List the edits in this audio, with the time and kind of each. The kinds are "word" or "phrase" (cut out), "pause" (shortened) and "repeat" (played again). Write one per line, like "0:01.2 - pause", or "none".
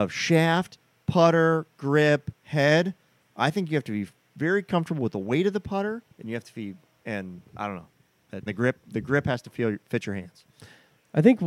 0:02.4 - pause
0:06.1 - pause
0:07.6 - word
0:08.5 - word